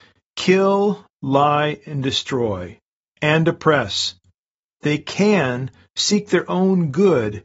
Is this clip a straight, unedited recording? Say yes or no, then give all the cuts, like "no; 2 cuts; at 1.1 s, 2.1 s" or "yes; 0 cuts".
yes; 0 cuts